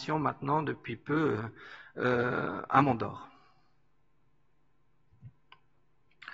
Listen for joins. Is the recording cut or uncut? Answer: uncut